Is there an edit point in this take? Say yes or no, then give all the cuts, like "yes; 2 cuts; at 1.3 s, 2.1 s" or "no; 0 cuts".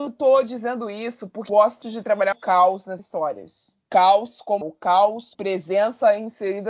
yes; 6 cuts; at 1.5 s, 1.8 s, 2.3 s, 3.0 s, 4.6 s, 5.3 s